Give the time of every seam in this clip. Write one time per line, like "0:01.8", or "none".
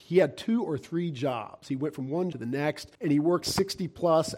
0:02.3
0:02.9
0:03.4